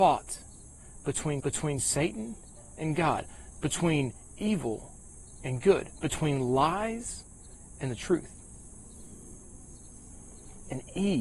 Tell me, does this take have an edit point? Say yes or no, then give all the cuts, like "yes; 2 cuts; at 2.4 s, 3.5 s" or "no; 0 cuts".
yes; 1 cut; at 1.4 s